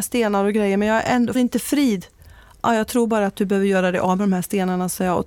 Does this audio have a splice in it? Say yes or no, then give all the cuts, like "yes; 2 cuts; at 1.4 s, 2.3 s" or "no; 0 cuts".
yes; 1 cut; at 1.3 s